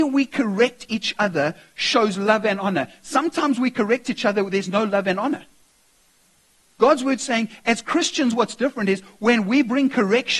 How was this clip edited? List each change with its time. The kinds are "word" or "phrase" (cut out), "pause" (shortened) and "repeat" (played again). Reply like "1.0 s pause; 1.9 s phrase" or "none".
none